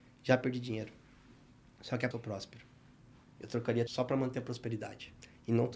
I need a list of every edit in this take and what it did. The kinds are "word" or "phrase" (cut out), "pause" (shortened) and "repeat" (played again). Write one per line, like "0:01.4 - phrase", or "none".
0:02.1 - phrase
0:03.9 - phrase